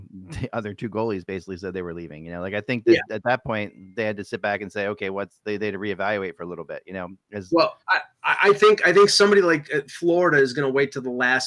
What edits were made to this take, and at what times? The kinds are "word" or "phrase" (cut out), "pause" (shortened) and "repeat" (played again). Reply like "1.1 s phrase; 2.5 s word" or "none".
none